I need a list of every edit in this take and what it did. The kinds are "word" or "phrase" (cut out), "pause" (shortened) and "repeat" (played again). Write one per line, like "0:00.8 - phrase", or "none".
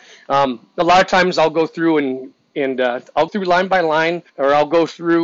0:03.3 - word
0:04.3 - pause